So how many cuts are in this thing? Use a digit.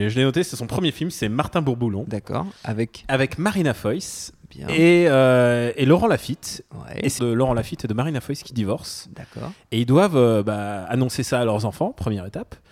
1